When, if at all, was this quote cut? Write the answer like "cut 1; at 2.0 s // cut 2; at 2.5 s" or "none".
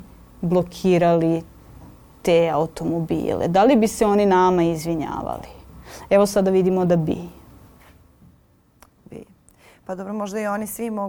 none